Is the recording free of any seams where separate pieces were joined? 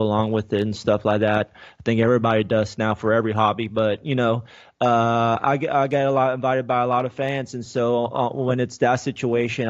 yes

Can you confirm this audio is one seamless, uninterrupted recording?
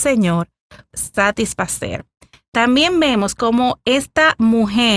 no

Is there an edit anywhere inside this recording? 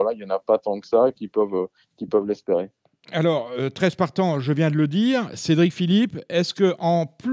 no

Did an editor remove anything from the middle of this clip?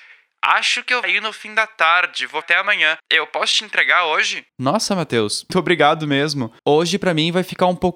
yes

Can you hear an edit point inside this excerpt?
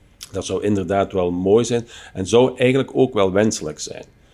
no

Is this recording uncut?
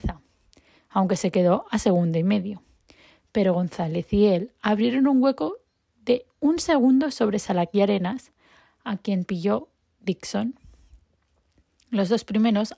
yes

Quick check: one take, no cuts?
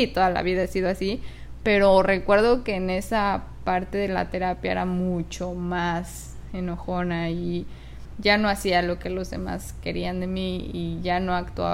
yes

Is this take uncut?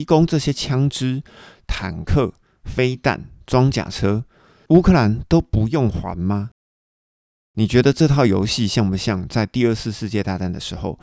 yes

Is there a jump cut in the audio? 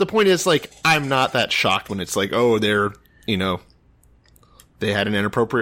no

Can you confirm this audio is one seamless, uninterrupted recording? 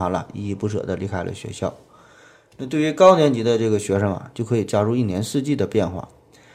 yes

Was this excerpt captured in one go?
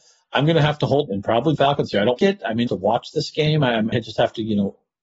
no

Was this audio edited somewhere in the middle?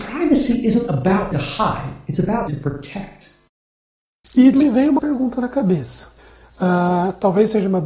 yes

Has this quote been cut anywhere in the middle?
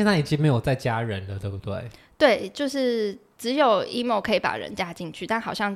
no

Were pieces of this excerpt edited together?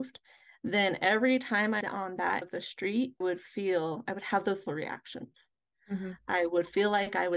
yes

